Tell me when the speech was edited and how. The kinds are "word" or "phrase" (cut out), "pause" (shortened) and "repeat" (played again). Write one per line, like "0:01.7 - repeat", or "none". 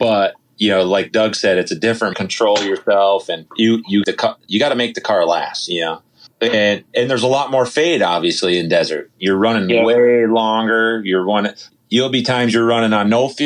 0:02.1 - phrase
0:03.5 - pause
0:04.0 - phrase
0:04.5 - word
0:06.3 - word
0:06.9 - word
0:11.7 - word